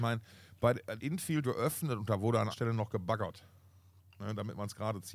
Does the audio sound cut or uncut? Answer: cut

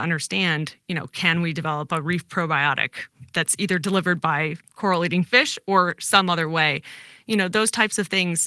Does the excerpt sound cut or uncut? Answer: uncut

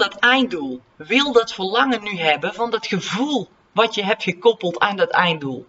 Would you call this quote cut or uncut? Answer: cut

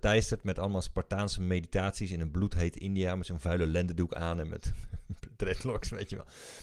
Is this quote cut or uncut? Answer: uncut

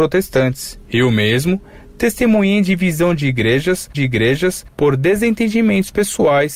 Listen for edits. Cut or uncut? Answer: cut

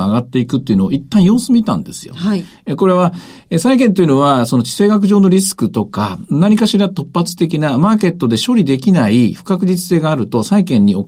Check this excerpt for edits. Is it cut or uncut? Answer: uncut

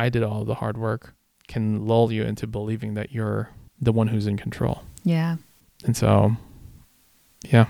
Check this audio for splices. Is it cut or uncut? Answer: cut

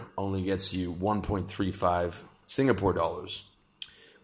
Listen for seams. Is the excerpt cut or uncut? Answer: uncut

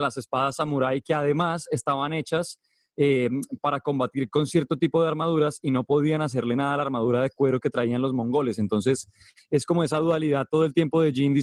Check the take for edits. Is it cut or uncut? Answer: uncut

